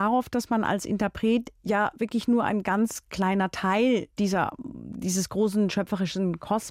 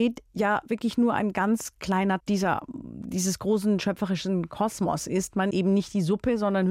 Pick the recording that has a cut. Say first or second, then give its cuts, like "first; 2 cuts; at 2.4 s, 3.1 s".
second; 2 cuts; at 2.2 s, 5.5 s